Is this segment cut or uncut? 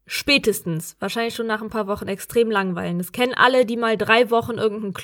uncut